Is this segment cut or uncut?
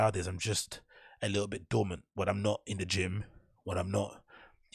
uncut